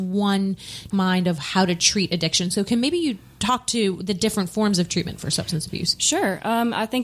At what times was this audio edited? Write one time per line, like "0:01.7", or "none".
0:00.9